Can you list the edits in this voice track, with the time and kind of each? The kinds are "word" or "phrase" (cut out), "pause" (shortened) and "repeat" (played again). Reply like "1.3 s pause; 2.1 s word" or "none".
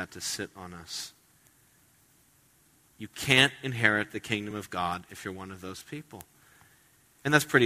none